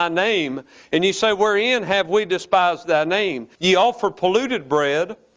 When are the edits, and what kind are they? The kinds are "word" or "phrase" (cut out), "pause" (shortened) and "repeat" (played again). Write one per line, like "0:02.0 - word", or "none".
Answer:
0:03.5 - pause